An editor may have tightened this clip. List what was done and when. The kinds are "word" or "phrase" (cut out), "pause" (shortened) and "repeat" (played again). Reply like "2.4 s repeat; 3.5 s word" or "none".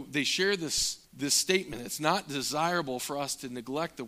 1.1 s pause